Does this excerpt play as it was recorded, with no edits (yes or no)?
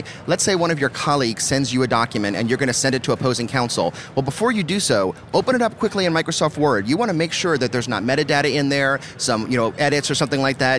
yes